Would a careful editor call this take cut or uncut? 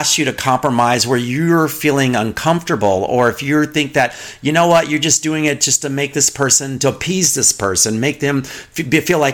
uncut